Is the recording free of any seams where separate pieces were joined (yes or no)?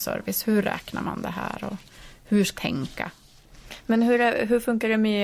no